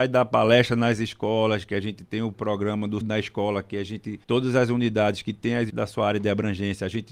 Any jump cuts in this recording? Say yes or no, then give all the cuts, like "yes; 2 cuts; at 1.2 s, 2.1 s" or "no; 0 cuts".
yes; 3 cuts; at 3.0 s, 4.2 s, 5.7 s